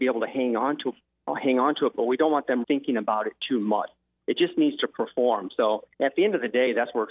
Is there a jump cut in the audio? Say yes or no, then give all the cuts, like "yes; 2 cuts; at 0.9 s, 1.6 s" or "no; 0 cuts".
yes; 2 cuts; at 2.6 s, 5.9 s